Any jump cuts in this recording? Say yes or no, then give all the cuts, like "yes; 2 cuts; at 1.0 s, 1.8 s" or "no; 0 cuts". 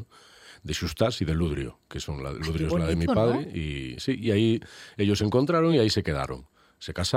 no; 0 cuts